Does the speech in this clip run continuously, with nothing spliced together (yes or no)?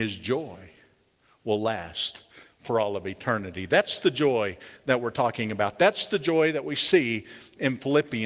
yes